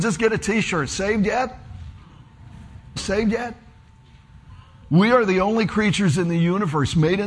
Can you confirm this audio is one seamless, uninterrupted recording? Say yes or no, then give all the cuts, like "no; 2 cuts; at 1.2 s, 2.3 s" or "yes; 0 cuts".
no; 1 cut; at 3.0 s